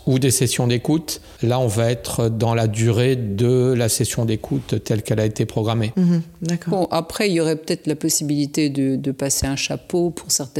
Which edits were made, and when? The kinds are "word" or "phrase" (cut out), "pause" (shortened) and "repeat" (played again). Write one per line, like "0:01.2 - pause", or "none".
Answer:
0:01.4 - pause